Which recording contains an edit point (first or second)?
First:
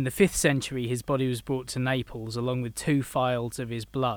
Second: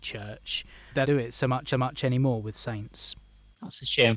second